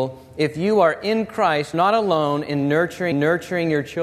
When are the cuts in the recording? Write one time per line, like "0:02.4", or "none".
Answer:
0:01.7
0:03.1